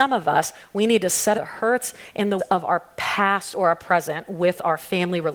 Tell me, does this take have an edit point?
yes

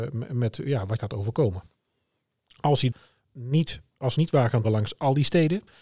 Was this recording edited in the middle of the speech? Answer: yes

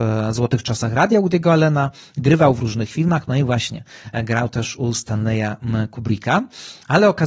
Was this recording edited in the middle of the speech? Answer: no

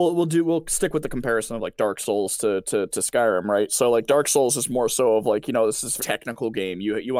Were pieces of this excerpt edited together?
yes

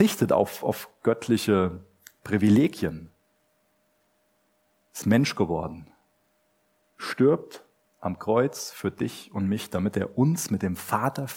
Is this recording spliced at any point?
no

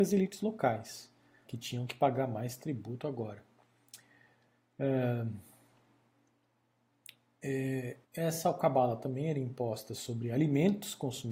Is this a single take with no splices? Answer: no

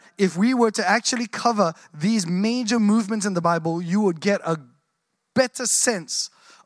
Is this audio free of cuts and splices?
yes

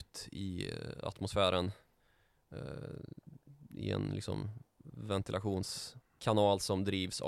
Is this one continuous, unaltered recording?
yes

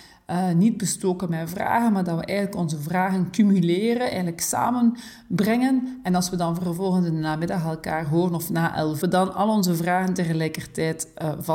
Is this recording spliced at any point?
yes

